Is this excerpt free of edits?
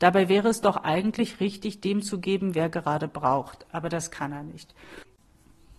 yes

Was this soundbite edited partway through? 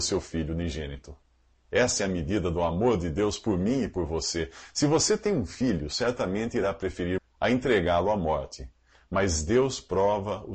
yes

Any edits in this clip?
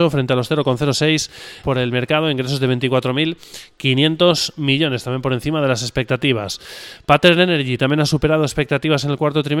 yes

